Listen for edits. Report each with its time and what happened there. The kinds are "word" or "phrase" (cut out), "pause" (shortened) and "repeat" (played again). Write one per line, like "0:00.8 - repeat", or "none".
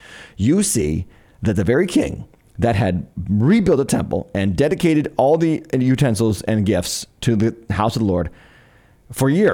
none